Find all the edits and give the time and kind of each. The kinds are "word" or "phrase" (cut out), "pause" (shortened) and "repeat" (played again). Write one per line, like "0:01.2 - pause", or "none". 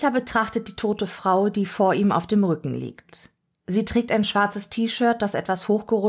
none